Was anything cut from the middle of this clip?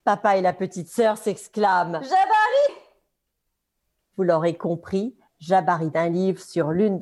yes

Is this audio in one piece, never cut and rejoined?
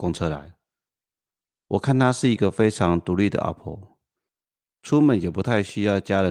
no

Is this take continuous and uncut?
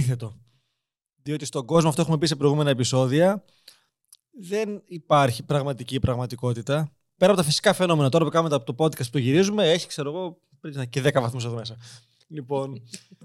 yes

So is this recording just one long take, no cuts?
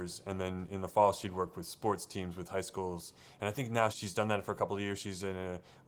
no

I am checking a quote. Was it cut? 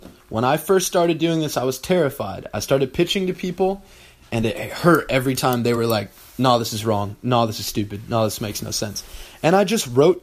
no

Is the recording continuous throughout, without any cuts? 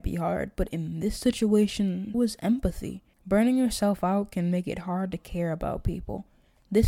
no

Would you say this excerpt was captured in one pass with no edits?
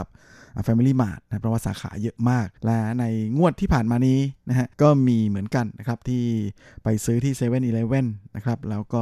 no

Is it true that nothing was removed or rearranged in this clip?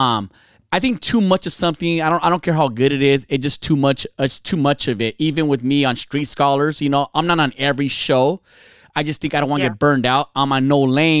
yes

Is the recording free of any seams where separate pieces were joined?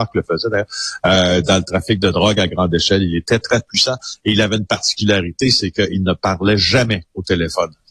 yes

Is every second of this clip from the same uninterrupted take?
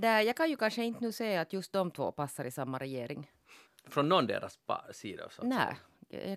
no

